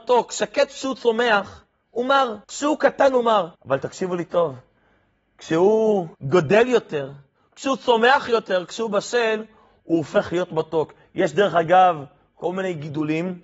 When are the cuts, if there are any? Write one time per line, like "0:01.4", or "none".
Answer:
0:02.4
0:03.5
0:06.1